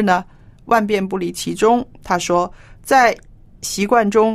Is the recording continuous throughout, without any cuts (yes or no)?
yes